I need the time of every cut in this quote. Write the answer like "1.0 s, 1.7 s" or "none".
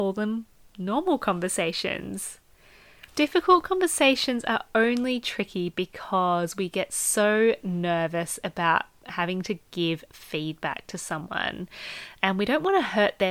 3.1 s